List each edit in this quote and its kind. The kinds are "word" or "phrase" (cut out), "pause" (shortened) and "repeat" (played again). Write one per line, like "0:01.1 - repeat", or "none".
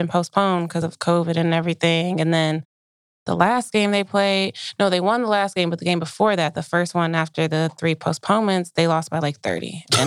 none